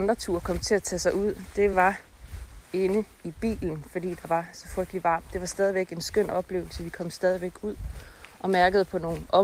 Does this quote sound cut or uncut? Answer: uncut